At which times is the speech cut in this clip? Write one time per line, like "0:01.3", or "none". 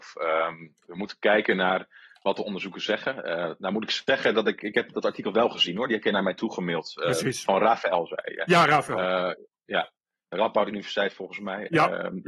none